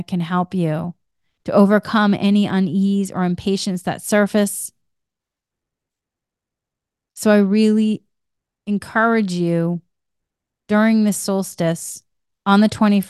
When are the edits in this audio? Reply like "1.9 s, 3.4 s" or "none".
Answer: none